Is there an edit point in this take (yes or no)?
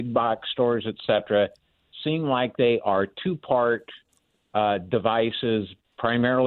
no